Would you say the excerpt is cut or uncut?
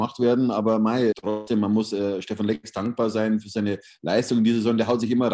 cut